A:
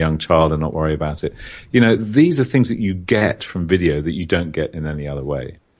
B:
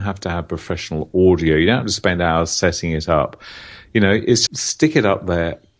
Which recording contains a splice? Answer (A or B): B